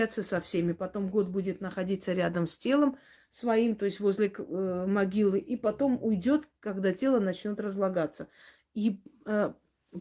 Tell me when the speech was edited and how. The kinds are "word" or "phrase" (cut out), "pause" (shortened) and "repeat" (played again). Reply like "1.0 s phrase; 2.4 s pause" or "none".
none